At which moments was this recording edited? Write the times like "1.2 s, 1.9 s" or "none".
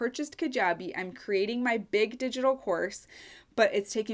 none